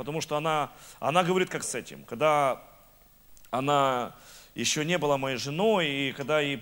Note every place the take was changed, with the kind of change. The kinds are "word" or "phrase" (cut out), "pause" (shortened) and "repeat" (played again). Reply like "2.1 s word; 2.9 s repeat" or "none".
1.6 s phrase